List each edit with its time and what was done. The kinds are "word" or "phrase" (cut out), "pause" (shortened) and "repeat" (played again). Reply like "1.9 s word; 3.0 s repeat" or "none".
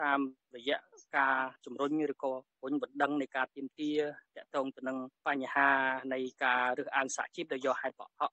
1.6 s pause